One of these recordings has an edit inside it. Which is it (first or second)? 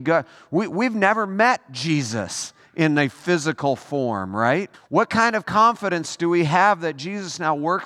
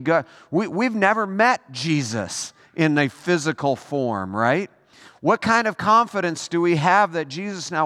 first